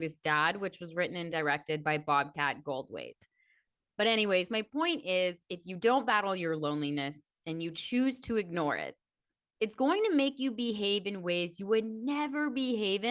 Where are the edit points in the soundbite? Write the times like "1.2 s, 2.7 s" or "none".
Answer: none

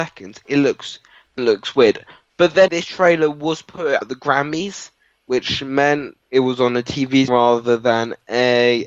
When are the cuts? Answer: 1.4 s, 2.7 s, 4.0 s, 6.2 s, 7.3 s

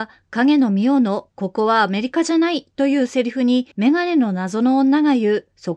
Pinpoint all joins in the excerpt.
3.7 s

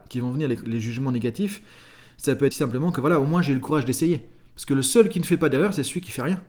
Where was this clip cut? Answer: 2.5 s

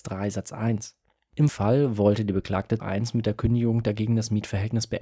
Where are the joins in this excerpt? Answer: 1.5 s, 2.8 s

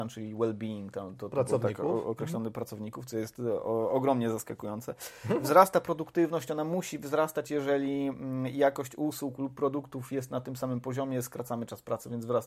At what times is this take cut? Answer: none

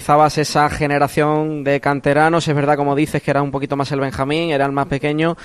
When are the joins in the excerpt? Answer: none

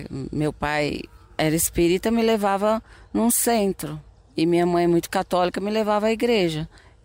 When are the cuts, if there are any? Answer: none

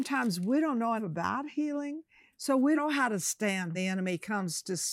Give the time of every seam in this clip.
1.0 s, 2.8 s, 3.7 s

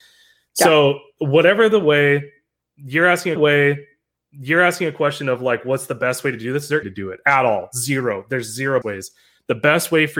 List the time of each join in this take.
3.4 s, 6.8 s, 8.8 s

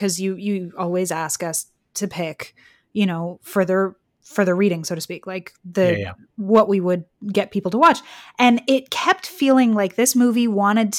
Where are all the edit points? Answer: none

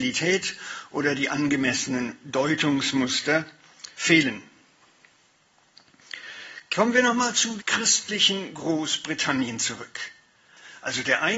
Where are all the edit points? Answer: 3.9 s, 7.6 s

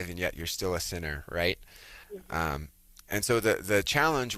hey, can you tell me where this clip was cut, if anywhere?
2.0 s

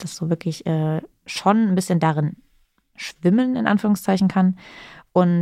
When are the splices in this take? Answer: none

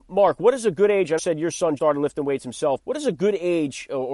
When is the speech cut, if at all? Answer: 1.2 s, 1.8 s, 2.8 s

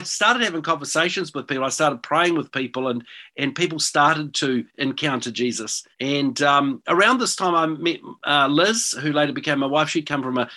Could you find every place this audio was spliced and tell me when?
5.9 s

